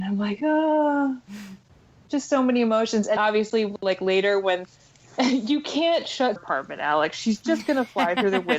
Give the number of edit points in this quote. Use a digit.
2